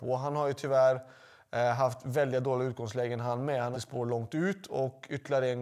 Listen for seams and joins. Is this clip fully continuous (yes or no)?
no